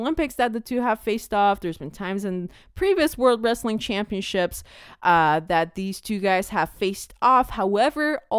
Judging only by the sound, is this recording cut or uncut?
uncut